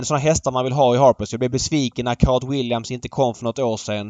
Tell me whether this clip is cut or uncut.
uncut